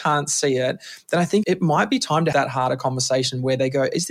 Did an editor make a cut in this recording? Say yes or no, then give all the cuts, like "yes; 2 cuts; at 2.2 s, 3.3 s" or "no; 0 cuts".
yes; 2 cuts; at 1.4 s, 2.3 s